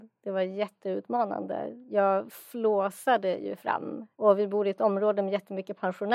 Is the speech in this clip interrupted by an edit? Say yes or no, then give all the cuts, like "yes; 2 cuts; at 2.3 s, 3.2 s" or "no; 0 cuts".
yes; 1 cut; at 4.1 s